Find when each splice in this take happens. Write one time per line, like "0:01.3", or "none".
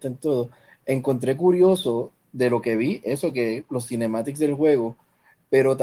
none